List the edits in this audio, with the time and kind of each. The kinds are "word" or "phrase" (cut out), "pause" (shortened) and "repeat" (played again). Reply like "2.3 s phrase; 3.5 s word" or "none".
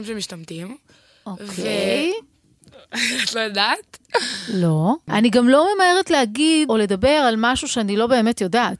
6.7 s word